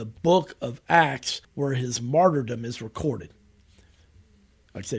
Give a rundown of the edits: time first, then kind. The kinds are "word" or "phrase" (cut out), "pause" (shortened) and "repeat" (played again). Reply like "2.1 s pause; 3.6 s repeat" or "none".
1.4 s pause